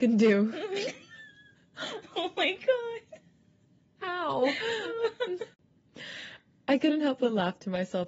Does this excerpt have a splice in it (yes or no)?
no